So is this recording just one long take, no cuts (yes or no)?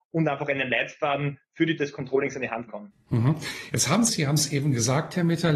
no